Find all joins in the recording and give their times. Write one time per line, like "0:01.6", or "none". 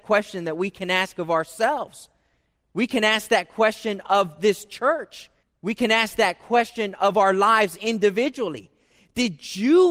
0:05.4